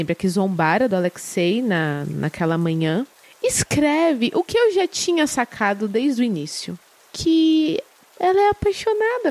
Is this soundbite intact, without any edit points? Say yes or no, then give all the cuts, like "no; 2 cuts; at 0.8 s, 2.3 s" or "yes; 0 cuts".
yes; 0 cuts